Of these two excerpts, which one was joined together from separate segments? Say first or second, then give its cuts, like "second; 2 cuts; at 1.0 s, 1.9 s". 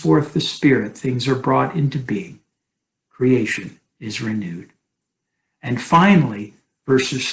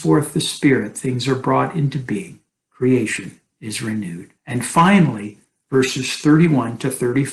second; 2 cuts; at 2.5 s, 4.4 s